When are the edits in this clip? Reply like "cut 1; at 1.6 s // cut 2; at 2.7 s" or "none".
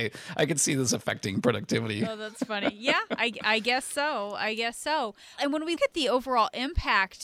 cut 1; at 5.4 s // cut 2; at 5.8 s